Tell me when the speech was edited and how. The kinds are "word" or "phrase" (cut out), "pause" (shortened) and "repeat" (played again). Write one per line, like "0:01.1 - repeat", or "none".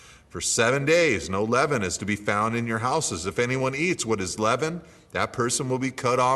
none